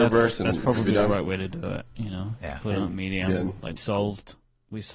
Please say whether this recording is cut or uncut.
cut